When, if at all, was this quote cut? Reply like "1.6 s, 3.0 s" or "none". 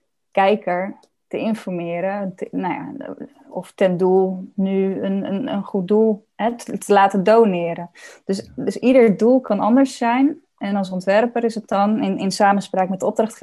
1.1 s